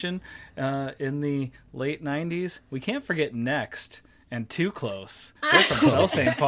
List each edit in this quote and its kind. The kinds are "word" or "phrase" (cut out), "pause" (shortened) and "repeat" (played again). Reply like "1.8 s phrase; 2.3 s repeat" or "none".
5.4 s pause